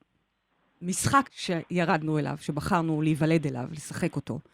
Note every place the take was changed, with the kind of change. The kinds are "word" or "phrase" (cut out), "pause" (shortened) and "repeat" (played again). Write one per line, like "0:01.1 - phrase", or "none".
0:01.2 - word